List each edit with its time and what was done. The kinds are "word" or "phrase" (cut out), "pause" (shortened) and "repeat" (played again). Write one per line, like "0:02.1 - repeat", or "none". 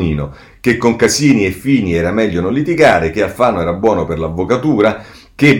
none